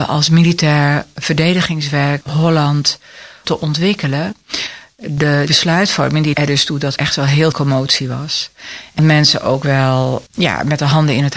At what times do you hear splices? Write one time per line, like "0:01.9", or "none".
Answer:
0:02.2
0:03.4
0:05.5
0:06.3
0:07.0
0:07.5
0:09.0
0:10.3